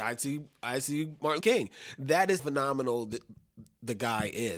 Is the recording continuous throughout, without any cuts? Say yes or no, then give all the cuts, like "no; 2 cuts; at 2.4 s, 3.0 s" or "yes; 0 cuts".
no; 2 cuts; at 1.4 s, 2.4 s